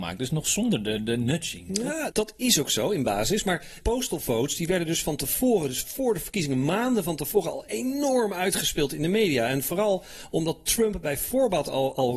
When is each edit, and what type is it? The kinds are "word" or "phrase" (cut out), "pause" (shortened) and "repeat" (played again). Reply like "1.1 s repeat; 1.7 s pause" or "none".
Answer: 2.1 s word; 3.8 s word